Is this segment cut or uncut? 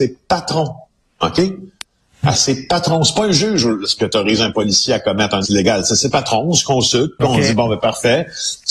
cut